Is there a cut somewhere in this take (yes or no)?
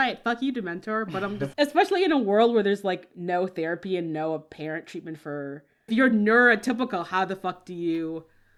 yes